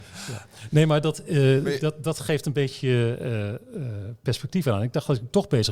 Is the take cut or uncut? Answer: uncut